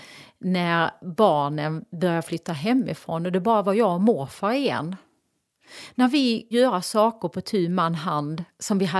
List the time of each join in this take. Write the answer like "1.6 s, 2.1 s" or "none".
6.5 s